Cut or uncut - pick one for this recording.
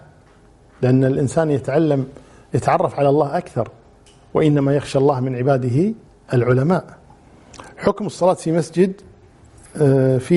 cut